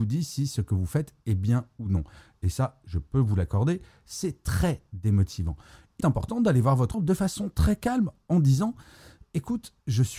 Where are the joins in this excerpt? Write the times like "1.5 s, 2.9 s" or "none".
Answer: 6.0 s, 6.9 s